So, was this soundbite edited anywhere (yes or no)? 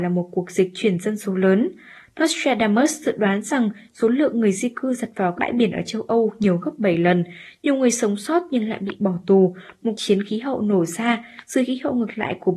yes